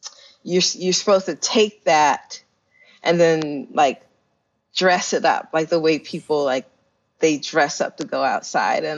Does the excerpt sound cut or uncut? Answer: uncut